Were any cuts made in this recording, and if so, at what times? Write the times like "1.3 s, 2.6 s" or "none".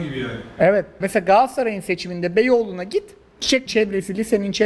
1.0 s, 3.7 s

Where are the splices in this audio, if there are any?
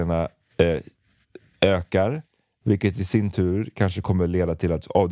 none

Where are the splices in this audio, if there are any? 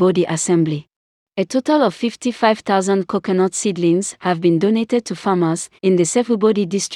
1.1 s, 5.8 s

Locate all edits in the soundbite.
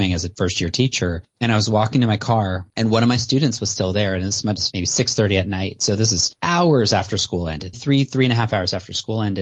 4.7 s, 7.7 s

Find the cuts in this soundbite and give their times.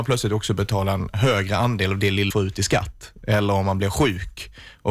2.3 s

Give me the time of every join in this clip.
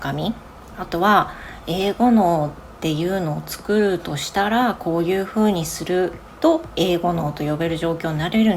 none

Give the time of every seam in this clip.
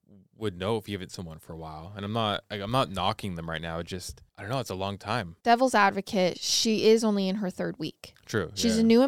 1.1 s, 4.3 s, 5.4 s

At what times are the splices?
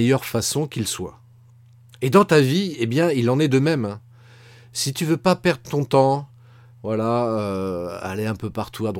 none

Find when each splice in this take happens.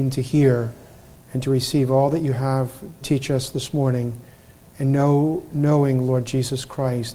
3.0 s

